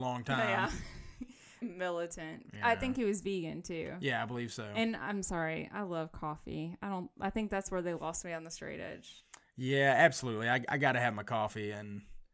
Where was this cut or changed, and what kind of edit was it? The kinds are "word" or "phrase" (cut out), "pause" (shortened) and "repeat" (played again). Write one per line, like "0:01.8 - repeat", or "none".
0:01.6 - word